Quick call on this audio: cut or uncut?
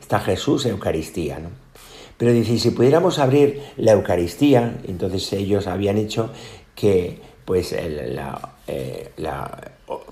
uncut